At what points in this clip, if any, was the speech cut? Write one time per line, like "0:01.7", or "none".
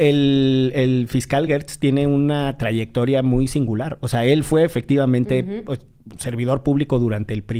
none